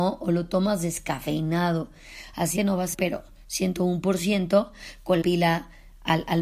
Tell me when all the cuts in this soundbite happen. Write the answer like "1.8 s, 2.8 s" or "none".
2.6 s, 2.9 s, 5.2 s